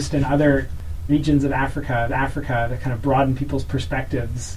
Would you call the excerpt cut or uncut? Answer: cut